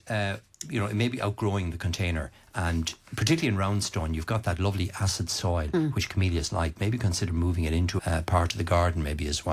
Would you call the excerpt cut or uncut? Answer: cut